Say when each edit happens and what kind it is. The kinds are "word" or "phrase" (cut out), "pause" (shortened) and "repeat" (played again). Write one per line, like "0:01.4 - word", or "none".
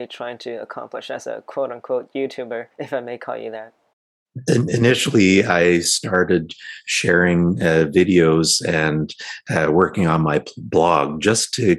0:02.7 - pause